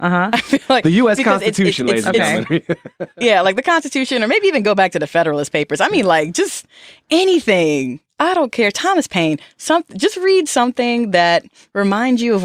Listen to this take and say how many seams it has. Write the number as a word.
zero